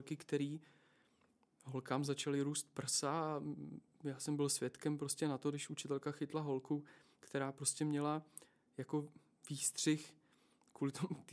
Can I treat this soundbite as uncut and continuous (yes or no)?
yes